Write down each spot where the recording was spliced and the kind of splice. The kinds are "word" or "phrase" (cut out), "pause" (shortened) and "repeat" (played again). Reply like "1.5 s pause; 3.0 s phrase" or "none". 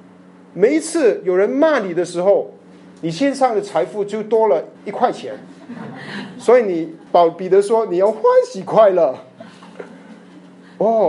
4.7 s pause; 7.1 s pause